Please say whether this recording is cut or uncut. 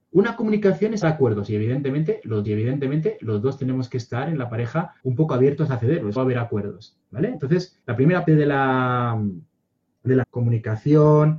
cut